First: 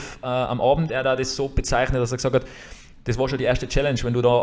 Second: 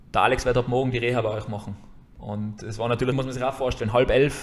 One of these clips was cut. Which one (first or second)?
second